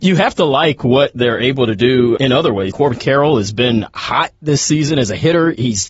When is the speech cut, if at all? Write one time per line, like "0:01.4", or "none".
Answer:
0:02.2
0:02.7